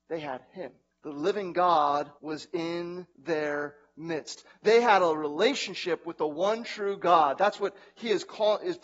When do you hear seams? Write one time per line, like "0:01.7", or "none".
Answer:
0:00.9
0:02.2
0:03.1